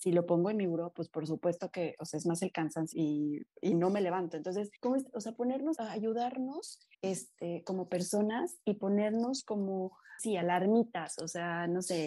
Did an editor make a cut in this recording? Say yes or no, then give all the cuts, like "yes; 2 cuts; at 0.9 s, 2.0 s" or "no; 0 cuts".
yes; 6 cuts; at 2.9 s, 3.5 s, 4.8 s, 5.8 s, 6.9 s, 10.2 s